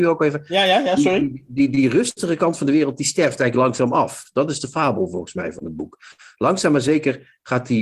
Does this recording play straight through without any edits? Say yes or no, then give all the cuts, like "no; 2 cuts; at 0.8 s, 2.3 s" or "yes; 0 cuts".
yes; 0 cuts